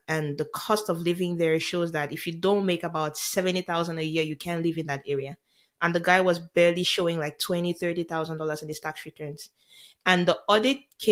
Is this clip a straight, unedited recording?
yes; 0 cuts

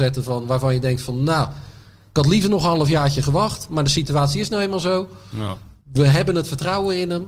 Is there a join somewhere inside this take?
no; 0 cuts

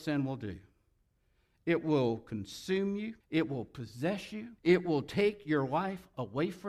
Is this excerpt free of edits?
no; 2 cuts; at 3.2 s, 4.6 s

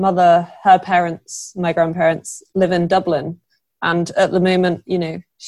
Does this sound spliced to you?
no; 0 cuts

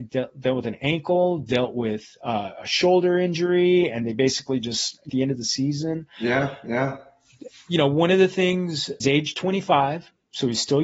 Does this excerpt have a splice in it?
yes; 2 cuts; at 5.1 s, 9.0 s

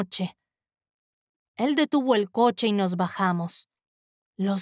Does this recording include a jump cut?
no; 0 cuts

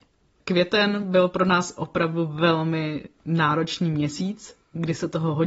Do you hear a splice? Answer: no; 0 cuts

